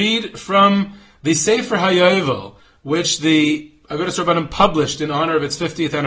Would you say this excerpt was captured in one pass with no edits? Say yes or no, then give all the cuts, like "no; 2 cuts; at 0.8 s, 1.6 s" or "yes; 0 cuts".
yes; 0 cuts